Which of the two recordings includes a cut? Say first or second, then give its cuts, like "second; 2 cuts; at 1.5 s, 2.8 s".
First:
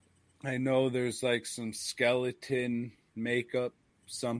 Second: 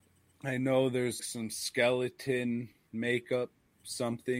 second; 1 cut; at 1.2 s